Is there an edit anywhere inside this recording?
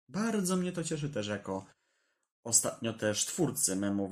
no; 0 cuts

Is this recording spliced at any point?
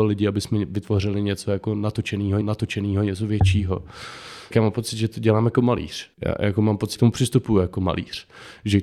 yes; 4 cuts; at 2.4 s, 4.5 s, 6.1 s, 6.9 s

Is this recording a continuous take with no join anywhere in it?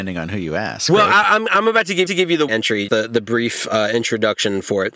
no; 3 cuts; at 2.1 s, 2.5 s, 2.9 s

